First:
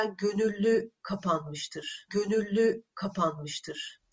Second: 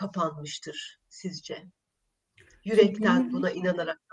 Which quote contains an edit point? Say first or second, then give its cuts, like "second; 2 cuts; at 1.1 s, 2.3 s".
first; 1 cut; at 2.1 s